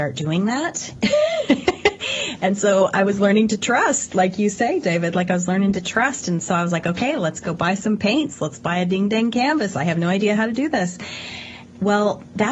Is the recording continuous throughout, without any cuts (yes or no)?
yes